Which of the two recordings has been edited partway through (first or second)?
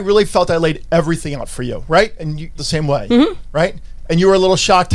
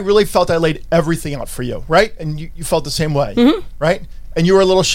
first